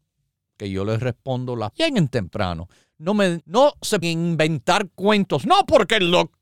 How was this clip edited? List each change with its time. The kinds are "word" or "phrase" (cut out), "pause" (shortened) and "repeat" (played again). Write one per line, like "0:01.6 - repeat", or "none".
0:01.7 - word
0:03.4 - word
0:04.0 - word

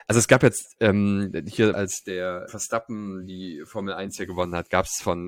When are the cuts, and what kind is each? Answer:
0:01.7 - word
0:02.5 - word

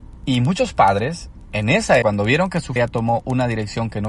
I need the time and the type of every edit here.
0:02.0 - word
0:02.8 - word

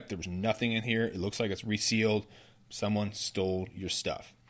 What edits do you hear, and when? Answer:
none

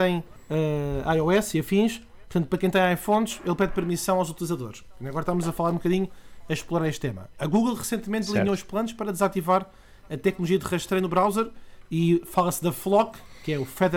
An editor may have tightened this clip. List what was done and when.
none

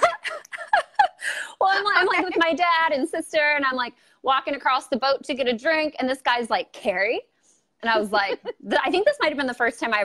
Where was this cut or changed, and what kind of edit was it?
none

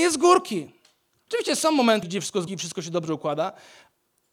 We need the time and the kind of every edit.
0:02.0 - word
0:02.5 - word

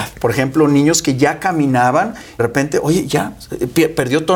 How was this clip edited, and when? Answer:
0:02.4 - phrase

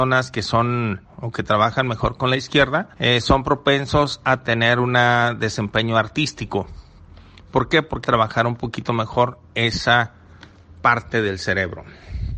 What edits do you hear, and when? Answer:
0:01.0 - word
0:02.9 - pause
0:08.0 - word

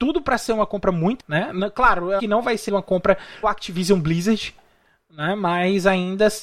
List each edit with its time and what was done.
0:01.2 - word
0:02.2 - word
0:02.7 - word
0:03.4 - word

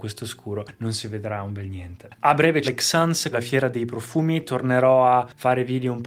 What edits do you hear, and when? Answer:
0:02.6 - word
0:03.3 - word

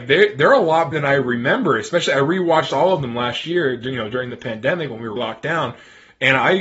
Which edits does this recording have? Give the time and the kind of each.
0:00.9 - word
0:05.2 - word

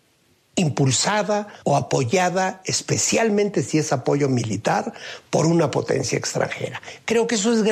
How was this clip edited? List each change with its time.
0:01.6 - pause

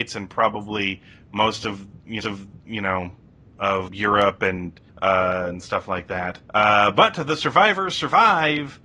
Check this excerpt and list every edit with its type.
0:02.2 - repeat
0:03.9 - word
0:04.9 - pause
0:06.4 - pause

